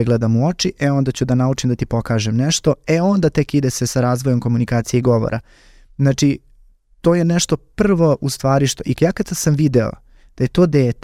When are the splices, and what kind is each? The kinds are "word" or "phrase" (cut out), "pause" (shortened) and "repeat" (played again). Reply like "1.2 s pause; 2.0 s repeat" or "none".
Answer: none